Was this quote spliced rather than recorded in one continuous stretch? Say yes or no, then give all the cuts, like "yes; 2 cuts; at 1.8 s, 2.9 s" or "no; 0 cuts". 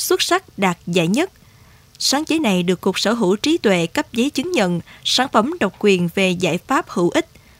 no; 0 cuts